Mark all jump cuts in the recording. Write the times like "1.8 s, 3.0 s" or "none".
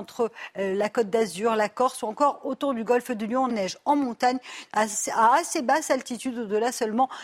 3.5 s